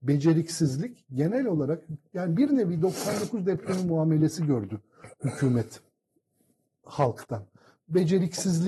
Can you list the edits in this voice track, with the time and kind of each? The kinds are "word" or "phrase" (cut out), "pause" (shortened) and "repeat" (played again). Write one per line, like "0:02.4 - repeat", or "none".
none